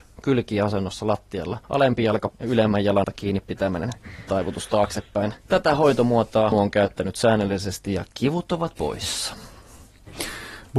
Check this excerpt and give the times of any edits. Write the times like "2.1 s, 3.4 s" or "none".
1.6 s, 2.3 s, 3.0 s, 4.3 s, 5.4 s, 6.5 s, 8.8 s